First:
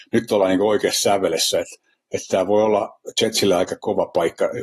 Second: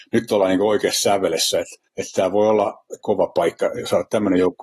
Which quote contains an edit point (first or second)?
second